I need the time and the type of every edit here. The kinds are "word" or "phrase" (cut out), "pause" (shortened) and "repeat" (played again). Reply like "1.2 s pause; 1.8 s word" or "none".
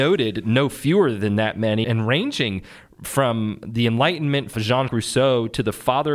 1.8 s word; 4.5 s word; 4.9 s word